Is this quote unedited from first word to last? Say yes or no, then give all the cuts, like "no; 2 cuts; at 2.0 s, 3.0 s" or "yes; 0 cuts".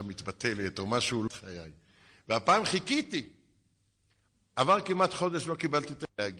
no; 1 cut; at 1.3 s